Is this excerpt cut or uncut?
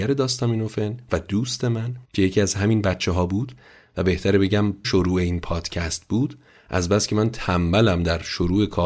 cut